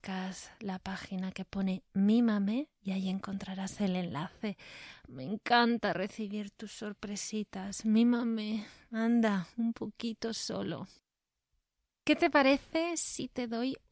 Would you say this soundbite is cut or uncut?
uncut